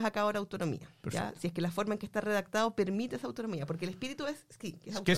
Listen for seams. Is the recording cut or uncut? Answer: uncut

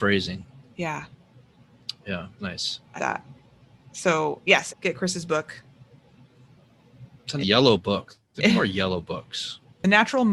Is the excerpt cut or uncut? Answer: cut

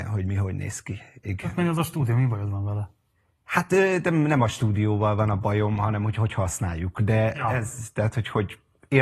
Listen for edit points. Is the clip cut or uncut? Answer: uncut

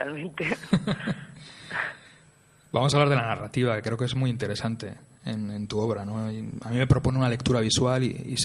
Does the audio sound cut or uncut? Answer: uncut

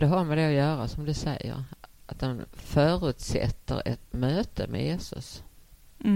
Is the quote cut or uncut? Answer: cut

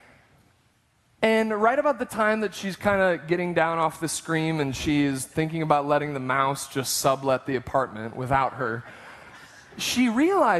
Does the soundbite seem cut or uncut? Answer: uncut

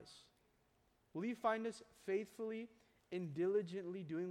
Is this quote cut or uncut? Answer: uncut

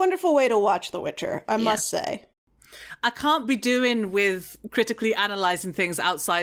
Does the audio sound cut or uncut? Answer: uncut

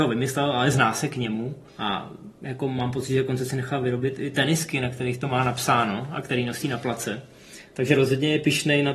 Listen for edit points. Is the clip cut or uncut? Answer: cut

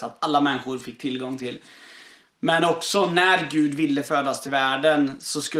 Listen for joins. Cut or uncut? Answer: uncut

